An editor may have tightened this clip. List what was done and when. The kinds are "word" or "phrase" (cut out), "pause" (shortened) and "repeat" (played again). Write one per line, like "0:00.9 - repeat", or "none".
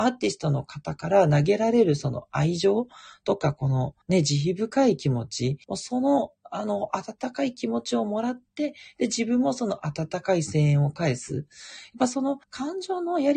0:04.0 - pause
0:05.6 - pause
0:12.4 - pause